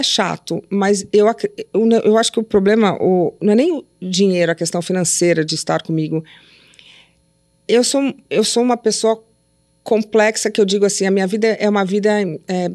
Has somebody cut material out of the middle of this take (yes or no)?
no